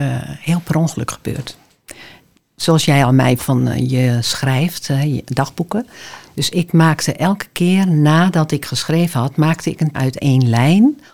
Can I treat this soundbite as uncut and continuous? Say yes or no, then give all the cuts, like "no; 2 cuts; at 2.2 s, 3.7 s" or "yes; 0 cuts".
no; 2 cuts; at 3.4 s, 9.9 s